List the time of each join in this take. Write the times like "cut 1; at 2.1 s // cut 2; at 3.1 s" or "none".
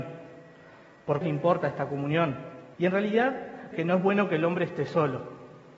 cut 1; at 1.2 s // cut 2; at 2.7 s // cut 3; at 3.7 s